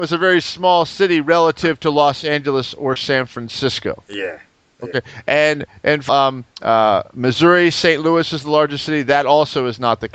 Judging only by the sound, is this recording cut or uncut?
cut